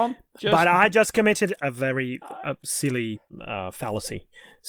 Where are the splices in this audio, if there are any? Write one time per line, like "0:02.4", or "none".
none